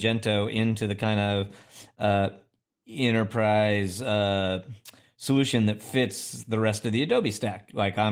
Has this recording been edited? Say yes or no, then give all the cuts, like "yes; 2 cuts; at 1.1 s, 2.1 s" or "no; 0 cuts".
no; 0 cuts